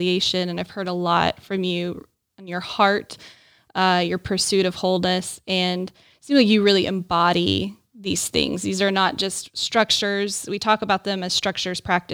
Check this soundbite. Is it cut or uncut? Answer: uncut